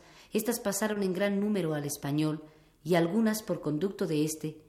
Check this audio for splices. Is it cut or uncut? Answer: uncut